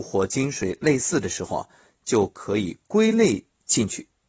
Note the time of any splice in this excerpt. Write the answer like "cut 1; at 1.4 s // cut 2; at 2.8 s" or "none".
none